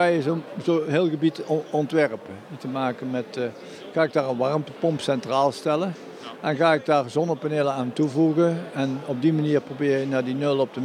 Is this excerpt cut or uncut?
cut